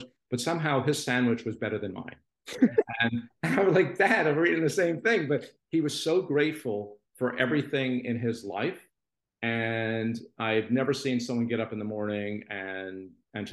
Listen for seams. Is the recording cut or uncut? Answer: uncut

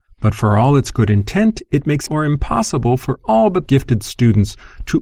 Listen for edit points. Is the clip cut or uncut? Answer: cut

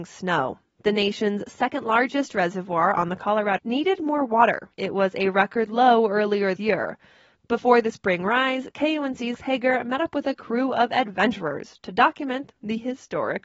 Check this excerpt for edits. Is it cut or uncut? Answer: cut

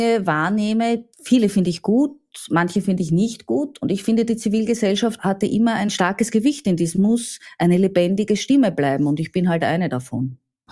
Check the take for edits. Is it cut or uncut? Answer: cut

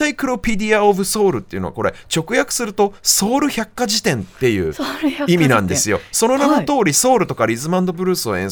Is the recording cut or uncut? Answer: uncut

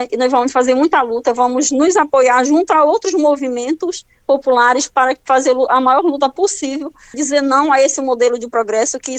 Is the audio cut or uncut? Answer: cut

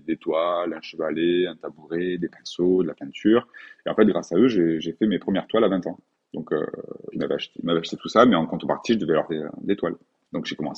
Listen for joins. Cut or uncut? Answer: cut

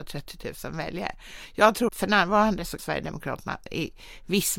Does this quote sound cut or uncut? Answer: cut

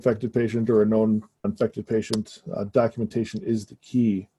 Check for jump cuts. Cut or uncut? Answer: cut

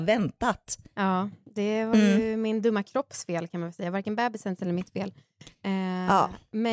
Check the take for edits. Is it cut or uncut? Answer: uncut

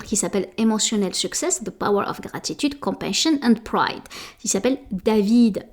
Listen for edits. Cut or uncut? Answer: uncut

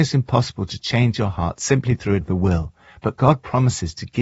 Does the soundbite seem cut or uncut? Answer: cut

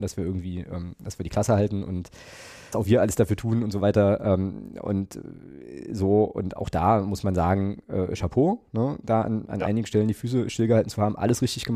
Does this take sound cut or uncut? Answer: cut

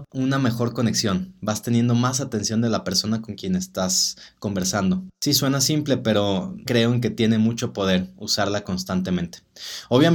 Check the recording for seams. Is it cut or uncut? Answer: cut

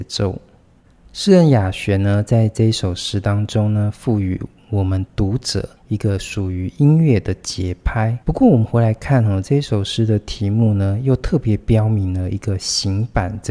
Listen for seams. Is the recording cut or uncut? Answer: cut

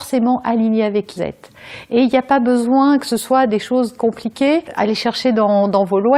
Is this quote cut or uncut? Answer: cut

